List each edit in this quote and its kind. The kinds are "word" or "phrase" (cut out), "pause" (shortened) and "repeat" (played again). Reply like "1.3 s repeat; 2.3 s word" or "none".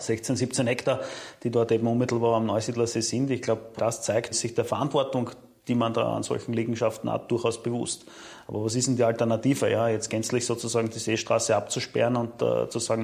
3.8 s word; 4.3 s word